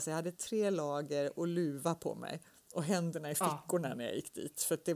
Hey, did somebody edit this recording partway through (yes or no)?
no